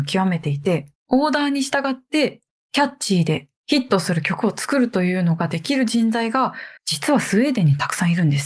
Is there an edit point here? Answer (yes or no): yes